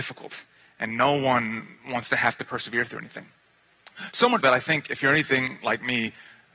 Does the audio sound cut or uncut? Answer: cut